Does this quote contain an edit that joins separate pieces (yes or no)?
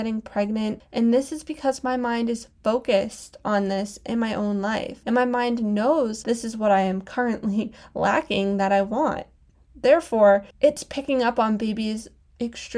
yes